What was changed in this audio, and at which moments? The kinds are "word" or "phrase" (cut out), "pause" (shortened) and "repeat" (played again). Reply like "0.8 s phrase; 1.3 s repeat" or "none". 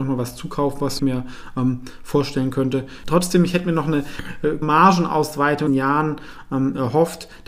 1.0 s word; 4.6 s word; 5.7 s phrase